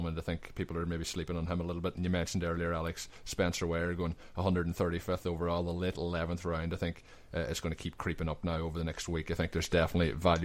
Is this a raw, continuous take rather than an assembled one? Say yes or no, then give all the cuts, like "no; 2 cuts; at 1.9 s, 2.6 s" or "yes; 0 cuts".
yes; 0 cuts